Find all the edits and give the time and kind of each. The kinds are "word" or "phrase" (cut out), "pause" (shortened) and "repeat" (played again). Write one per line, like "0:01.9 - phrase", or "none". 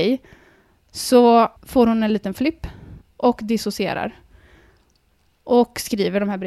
0:01.6 - pause
0:03.0 - pause